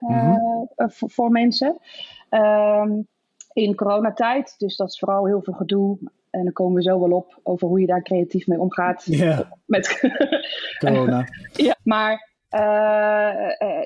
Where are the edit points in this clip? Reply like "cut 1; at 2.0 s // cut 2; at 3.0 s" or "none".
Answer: cut 1; at 11.7 s